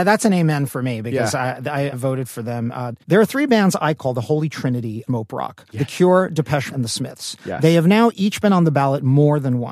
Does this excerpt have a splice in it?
yes; 5 cuts; at 1.9 s, 3.0 s, 5.1 s, 5.7 s, 6.7 s

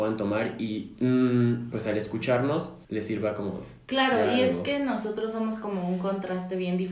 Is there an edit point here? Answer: yes; 1 cut; at 2.8 s

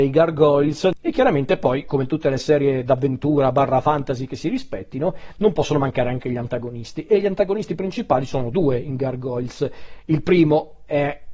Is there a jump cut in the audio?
no; 0 cuts

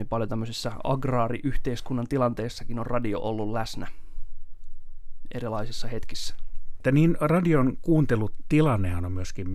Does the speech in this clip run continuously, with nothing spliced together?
yes; 0 cuts

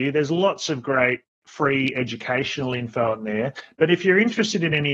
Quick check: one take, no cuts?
yes; 0 cuts

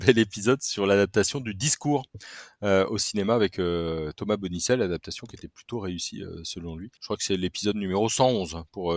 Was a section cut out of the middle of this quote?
yes; 1 cut; at 7.0 s

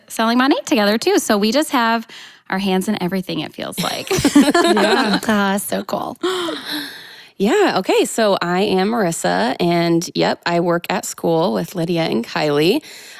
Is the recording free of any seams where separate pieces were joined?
yes; 0 cuts

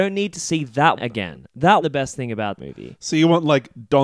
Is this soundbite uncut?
no; 3 cuts; at 1.0 s, 1.8 s, 2.6 s

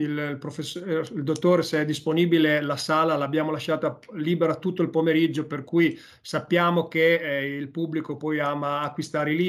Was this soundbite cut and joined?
no; 0 cuts

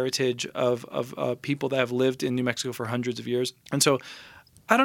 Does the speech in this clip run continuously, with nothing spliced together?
no; 1 cut; at 3.6 s

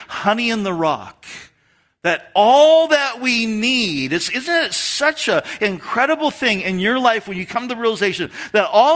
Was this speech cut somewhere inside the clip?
no; 0 cuts

